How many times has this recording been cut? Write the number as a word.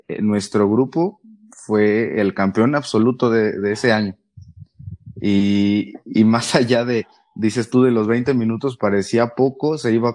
zero